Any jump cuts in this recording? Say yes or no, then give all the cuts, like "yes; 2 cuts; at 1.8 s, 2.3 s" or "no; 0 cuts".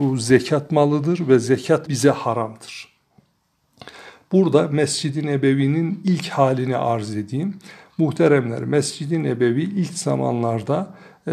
yes; 1 cut; at 1.9 s